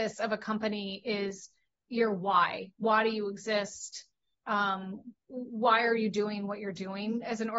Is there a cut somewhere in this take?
no; 0 cuts

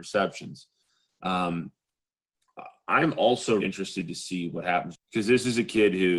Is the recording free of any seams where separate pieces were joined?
no; 2 cuts; at 3.6 s, 4.9 s

